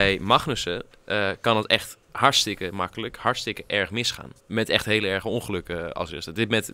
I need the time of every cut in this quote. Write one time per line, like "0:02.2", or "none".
0:04.4